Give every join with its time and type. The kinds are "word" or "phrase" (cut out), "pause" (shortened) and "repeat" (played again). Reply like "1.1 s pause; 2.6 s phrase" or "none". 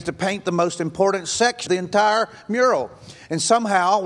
1.7 s word